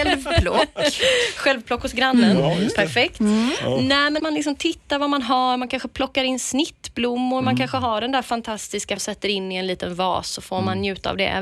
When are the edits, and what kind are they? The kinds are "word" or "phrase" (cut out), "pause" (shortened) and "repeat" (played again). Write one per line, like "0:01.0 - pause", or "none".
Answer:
0:04.2 - word
0:09.0 - word

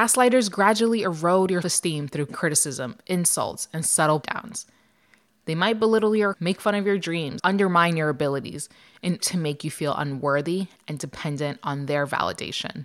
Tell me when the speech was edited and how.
0:01.6 - word
0:02.3 - word
0:04.2 - word
0:06.3 - word
0:07.4 - word
0:09.2 - word

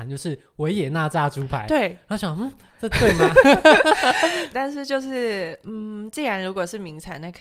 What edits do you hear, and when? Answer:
0:04.5 - word

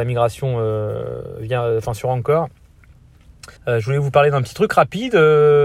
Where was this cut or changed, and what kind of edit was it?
0:03.6 - pause

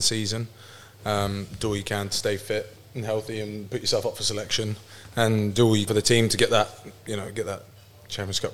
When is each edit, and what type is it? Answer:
0:05.9 - word

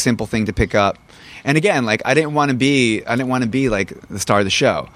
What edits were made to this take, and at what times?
none

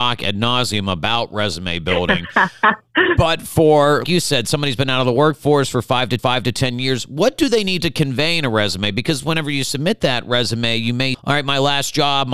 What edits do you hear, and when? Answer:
0:04.0 - word
0:06.2 - repeat
0:11.1 - word

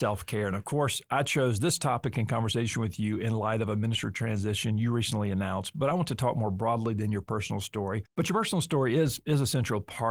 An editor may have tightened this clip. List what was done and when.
0:08.1 - pause

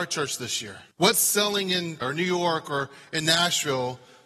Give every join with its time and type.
0:00.9 - pause
0:02.0 - word

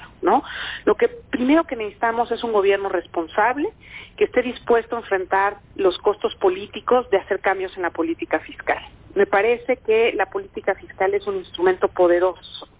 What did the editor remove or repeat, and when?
0:05.6 - pause

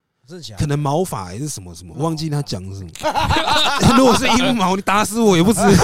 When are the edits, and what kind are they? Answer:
0:01.9 - word

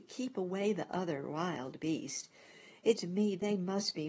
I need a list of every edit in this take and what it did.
0:03.0 - word

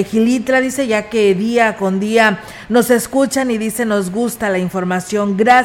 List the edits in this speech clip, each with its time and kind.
none

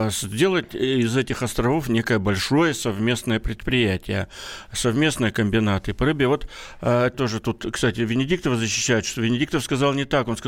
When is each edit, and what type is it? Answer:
0:07.1 - word

